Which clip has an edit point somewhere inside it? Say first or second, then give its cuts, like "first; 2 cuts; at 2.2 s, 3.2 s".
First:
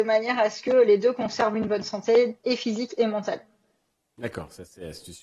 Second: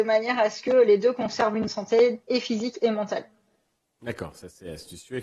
second; 1 cut; at 1.7 s